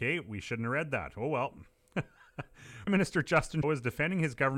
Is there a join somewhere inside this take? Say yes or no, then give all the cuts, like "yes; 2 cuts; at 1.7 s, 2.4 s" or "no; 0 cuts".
yes; 2 cuts; at 2.9 s, 3.6 s